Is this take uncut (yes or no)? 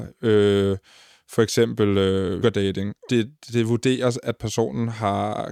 no